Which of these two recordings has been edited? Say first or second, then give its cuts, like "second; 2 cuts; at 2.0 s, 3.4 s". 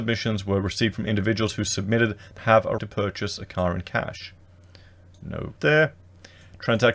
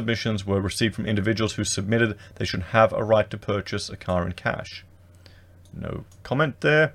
first; 3 cuts; at 2.4 s, 2.8 s, 5.6 s